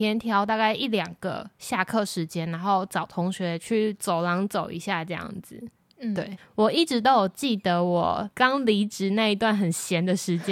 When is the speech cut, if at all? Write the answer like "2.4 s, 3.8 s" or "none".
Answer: none